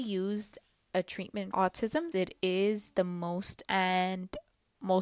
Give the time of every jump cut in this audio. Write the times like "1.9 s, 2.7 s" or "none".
0.9 s, 1.5 s, 2.1 s, 3.6 s